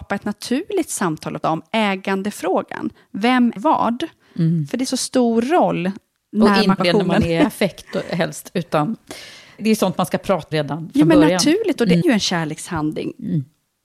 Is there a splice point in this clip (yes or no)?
yes